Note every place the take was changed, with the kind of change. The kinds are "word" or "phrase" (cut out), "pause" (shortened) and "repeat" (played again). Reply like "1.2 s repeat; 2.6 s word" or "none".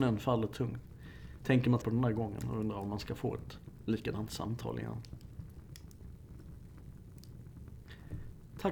1.8 s word